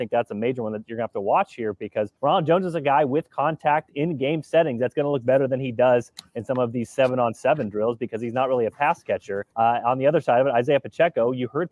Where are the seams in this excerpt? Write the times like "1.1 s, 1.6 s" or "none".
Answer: 2.2 s, 9.5 s